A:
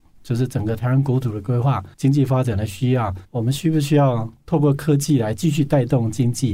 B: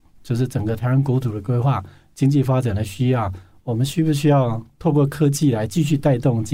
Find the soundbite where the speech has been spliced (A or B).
A